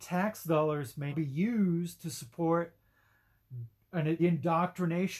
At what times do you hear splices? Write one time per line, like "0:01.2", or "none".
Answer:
0:01.1
0:04.2